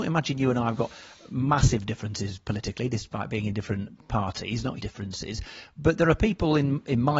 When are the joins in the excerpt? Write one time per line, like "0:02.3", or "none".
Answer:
0:04.8